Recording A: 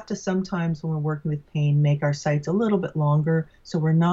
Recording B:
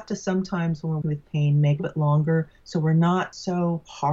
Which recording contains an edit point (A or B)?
B